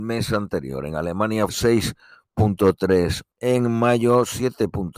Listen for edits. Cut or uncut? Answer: cut